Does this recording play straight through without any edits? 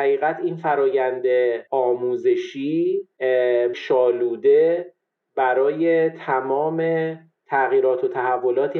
no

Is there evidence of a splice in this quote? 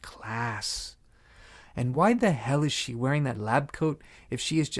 no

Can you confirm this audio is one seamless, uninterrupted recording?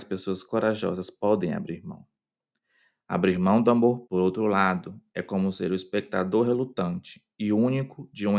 no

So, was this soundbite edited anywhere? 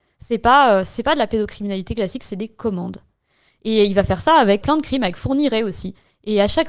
yes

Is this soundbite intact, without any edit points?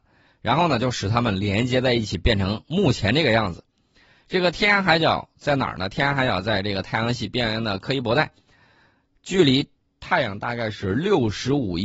yes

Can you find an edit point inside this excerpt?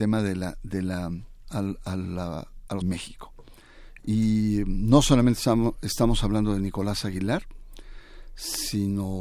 yes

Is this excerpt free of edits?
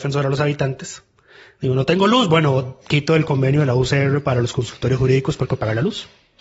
no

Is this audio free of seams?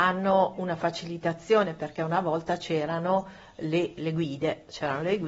yes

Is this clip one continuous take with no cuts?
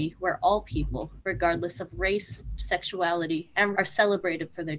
no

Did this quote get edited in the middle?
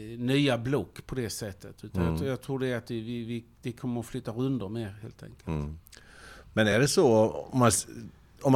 no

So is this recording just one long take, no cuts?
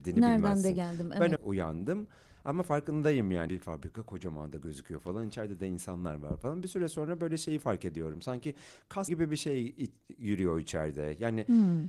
no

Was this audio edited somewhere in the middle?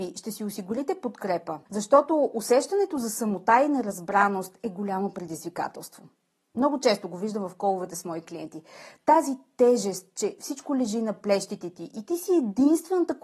yes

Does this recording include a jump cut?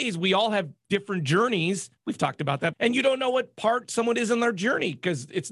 yes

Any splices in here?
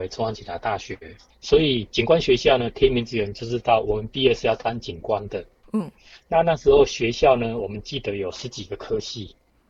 yes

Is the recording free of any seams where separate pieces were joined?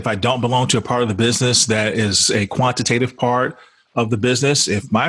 yes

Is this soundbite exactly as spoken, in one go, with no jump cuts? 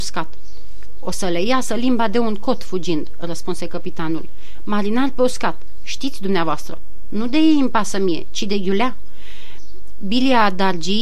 yes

